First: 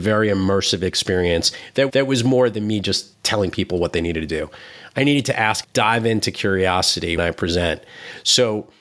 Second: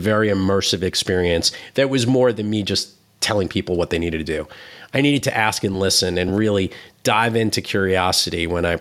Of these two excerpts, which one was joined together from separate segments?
first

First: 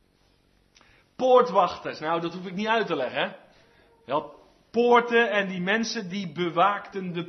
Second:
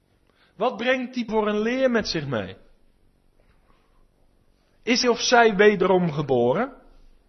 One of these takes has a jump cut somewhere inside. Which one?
second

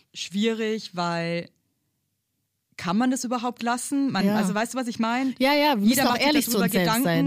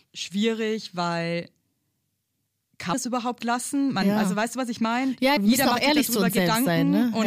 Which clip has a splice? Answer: second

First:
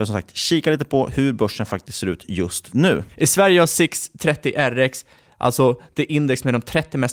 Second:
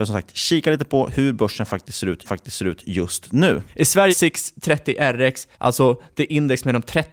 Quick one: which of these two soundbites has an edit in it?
second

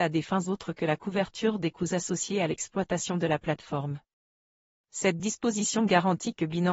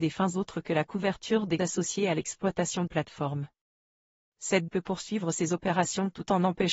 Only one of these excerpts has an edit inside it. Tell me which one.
second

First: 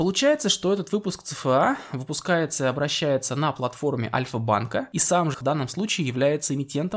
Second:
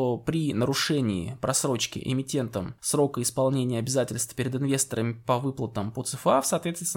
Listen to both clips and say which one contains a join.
first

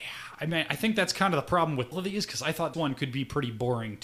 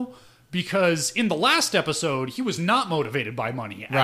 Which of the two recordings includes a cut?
first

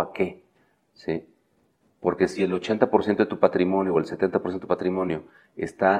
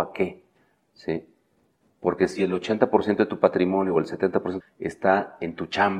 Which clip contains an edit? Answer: second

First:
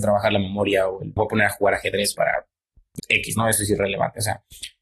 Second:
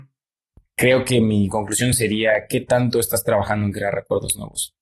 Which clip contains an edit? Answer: first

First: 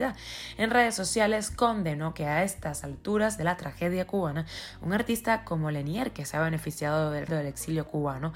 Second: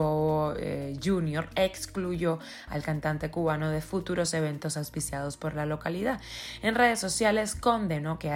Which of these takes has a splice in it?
first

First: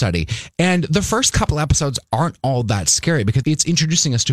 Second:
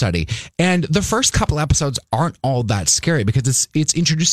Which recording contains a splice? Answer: first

